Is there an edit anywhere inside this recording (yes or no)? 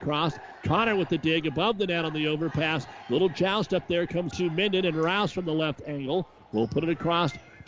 yes